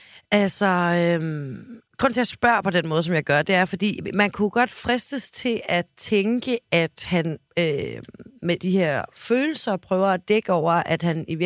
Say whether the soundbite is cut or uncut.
cut